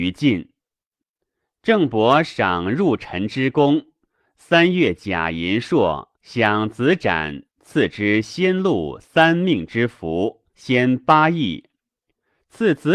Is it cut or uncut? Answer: cut